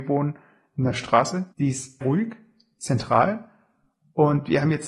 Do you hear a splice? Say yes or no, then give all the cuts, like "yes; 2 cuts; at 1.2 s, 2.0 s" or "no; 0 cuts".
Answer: yes; 3 cuts; at 1.5 s, 2.0 s, 2.8 s